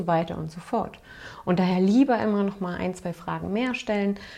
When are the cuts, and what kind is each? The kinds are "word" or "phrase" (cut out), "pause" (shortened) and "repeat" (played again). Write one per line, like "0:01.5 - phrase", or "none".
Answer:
none